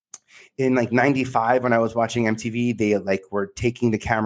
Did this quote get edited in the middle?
no; 0 cuts

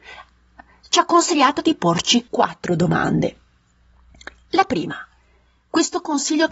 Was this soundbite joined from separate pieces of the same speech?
yes; 1 cut; at 2.3 s

